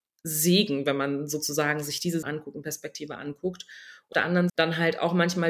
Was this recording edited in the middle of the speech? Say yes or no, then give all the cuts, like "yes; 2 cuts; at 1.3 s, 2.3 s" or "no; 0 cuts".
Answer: yes; 3 cuts; at 2.2 s, 4.1 s, 4.5 s